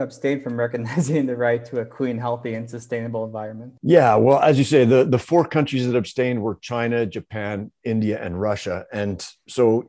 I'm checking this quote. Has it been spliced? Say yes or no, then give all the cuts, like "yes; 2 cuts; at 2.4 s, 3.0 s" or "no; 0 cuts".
yes; 1 cut; at 3.8 s